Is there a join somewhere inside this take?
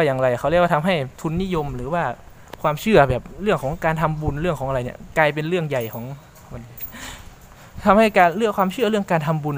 yes; 1 cut; at 1.1 s

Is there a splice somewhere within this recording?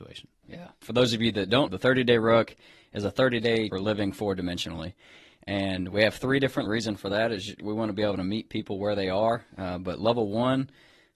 yes; 3 cuts; at 1.7 s, 3.7 s, 6.7 s

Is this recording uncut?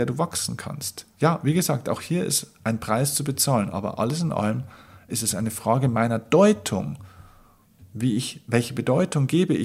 yes; 0 cuts

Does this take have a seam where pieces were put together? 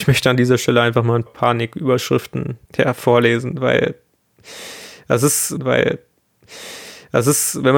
yes; 3 cuts; at 1.3 s, 2.7 s, 5.6 s

